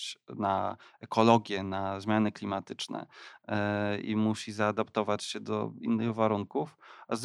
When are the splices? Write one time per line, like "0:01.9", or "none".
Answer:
none